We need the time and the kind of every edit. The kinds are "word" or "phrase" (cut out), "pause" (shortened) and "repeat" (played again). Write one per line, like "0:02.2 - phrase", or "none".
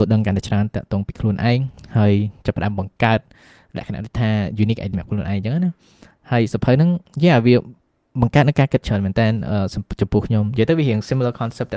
0:04.9 - word